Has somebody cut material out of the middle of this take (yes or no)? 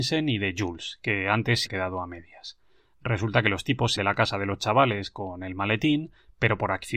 yes